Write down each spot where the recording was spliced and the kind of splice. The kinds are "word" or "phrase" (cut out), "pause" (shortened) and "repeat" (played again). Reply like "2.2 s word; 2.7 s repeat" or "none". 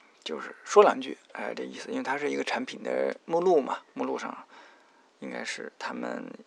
none